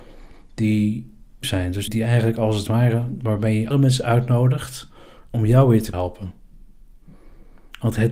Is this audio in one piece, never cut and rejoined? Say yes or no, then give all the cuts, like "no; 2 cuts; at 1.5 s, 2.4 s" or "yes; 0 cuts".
no; 4 cuts; at 1.4 s, 1.9 s, 3.7 s, 5.9 s